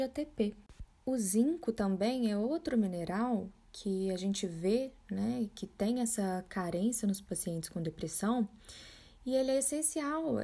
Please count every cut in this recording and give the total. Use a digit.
0